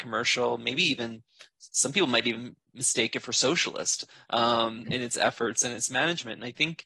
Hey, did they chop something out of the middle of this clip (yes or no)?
no